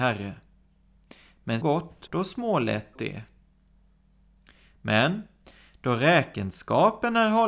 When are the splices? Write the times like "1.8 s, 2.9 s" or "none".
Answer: 1.6 s, 2.1 s, 3.0 s